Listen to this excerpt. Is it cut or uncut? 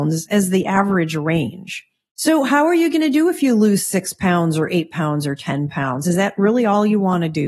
uncut